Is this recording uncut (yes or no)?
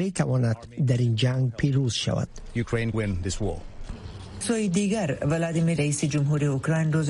no